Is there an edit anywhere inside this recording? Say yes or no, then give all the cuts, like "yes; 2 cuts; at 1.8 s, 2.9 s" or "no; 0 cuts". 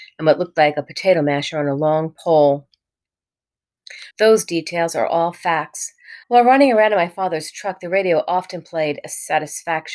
yes; 2 cuts; at 4.1 s, 6.2 s